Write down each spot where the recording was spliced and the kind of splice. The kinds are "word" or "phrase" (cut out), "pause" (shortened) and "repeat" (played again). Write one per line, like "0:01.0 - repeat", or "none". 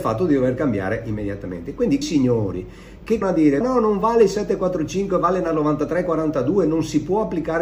0:02.0 - word
0:03.2 - word
0:03.6 - word

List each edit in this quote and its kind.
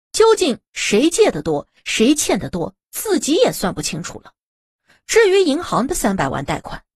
none

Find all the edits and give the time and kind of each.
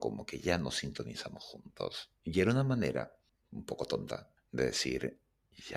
0:02.2 - pause
0:03.3 - pause
0:04.4 - pause

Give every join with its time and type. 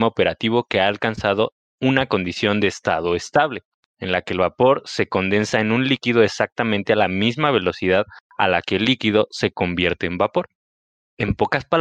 none

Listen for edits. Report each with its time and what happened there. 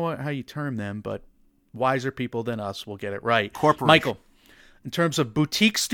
none

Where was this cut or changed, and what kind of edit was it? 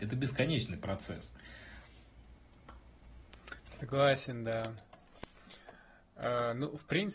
0:03.6 - pause

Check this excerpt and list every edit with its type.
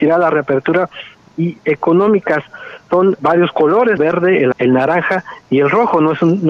0:01.3 - phrase
0:03.2 - word
0:04.0 - word
0:04.5 - word

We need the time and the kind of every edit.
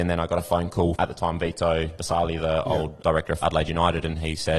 0:00.9 - word
0:02.0 - word
0:03.0 - word
0:03.4 - word

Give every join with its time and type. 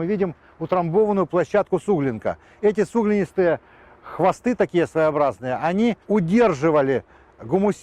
0:06.0 - pause

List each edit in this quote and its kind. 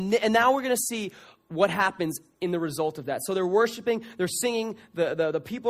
none

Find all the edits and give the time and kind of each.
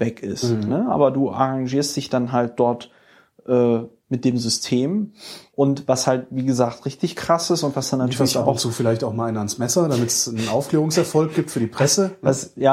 none

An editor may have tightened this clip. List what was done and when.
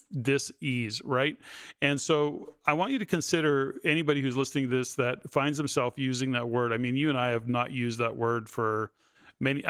none

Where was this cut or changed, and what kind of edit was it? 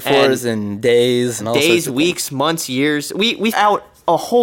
0:01.4 - word
0:03.5 - word

